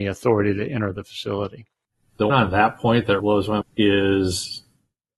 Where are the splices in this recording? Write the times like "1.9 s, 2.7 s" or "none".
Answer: 2.3 s, 3.2 s, 3.6 s